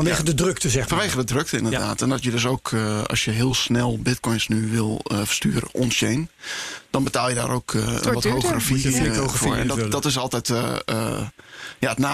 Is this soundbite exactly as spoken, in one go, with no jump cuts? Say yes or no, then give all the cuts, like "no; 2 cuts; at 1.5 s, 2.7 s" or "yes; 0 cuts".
yes; 0 cuts